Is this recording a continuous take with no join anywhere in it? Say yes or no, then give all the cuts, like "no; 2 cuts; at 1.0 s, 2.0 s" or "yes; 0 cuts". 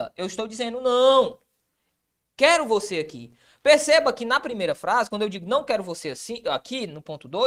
yes; 0 cuts